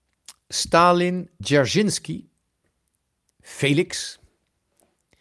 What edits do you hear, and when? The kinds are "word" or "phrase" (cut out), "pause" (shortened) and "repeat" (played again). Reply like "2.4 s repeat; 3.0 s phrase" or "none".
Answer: 1.4 s word